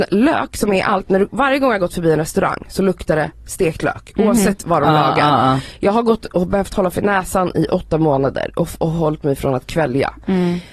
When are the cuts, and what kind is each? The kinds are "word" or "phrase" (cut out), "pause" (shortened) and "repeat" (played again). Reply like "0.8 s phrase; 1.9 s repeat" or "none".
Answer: none